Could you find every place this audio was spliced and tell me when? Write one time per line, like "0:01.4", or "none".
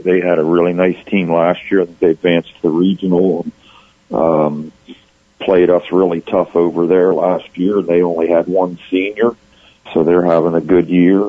0:09.9